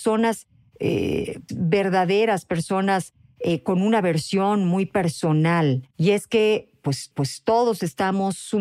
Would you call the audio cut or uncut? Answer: cut